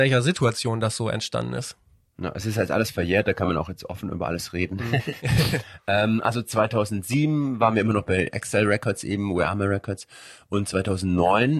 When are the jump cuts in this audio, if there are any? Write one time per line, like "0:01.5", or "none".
none